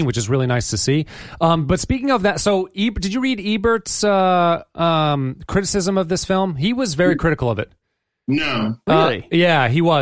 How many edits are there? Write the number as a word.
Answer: zero